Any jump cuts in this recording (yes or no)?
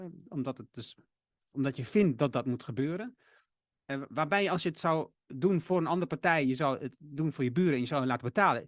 no